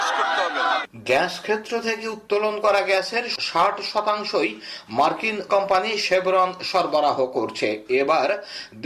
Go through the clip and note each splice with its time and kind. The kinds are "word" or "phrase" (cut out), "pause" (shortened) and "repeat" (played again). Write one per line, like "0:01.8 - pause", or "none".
0:01.0 - word
0:05.5 - word